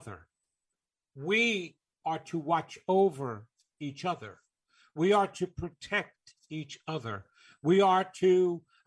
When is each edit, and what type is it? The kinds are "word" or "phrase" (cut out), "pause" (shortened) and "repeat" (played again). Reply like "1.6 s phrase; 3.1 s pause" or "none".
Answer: none